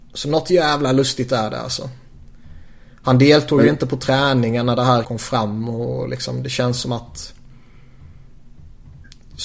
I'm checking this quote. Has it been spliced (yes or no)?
yes